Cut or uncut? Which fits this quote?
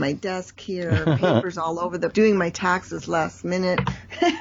cut